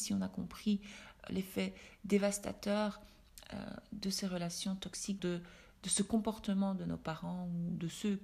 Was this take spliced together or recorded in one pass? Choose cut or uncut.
cut